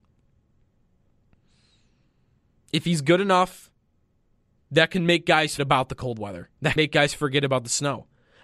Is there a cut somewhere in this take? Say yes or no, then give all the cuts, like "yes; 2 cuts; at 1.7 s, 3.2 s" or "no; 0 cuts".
yes; 3 cuts; at 4.6 s, 5.6 s, 6.8 s